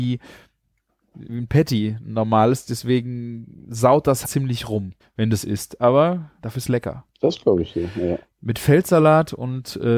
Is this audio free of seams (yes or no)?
no